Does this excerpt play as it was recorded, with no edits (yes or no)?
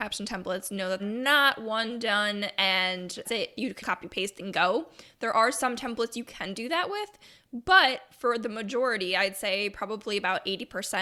no